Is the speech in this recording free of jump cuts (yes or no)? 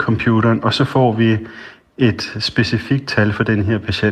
yes